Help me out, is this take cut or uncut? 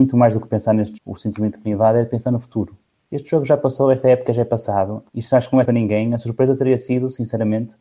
cut